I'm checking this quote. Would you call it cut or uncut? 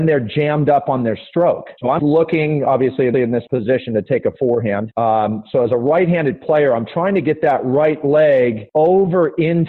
cut